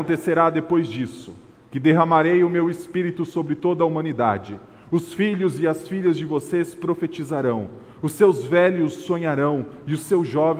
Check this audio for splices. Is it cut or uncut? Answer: uncut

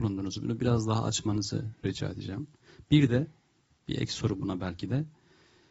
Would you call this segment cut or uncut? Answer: uncut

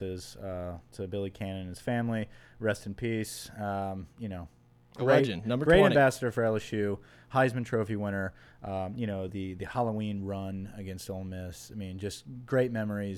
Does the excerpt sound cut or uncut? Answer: uncut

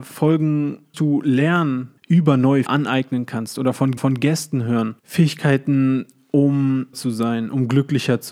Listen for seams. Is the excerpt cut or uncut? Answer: cut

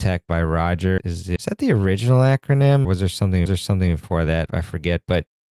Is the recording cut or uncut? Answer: cut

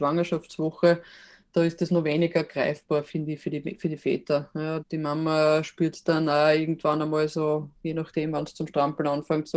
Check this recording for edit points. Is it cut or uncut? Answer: cut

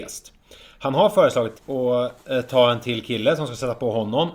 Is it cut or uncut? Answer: cut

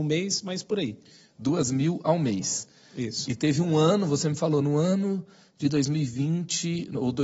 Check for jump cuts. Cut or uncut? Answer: uncut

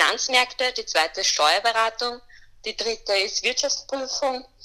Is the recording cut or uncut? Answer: uncut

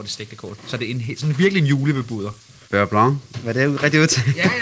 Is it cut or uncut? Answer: uncut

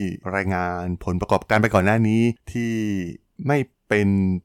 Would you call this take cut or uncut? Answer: uncut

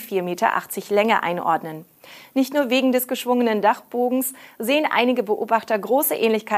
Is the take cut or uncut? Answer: uncut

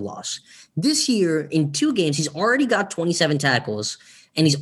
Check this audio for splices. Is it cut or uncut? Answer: uncut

